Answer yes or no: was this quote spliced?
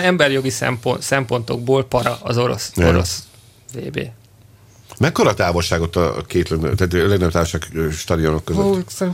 no